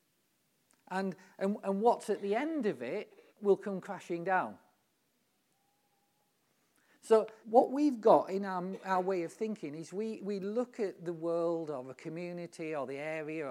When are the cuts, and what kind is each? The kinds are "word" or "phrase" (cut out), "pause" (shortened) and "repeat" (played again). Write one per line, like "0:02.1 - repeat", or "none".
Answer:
0:03.3 - pause
0:07.4 - pause